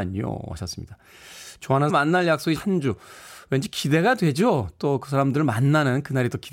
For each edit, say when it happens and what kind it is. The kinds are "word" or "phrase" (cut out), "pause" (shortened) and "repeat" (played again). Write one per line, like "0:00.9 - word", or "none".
0:01.9 - word
0:02.6 - word